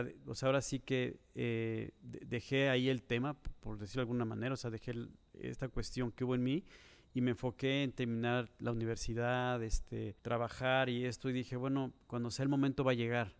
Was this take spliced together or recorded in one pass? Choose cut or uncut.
cut